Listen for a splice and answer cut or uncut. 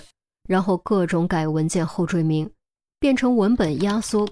uncut